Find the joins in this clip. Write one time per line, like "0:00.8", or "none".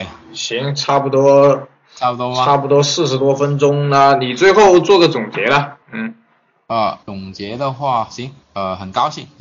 0:05.8
0:07.0
0:08.4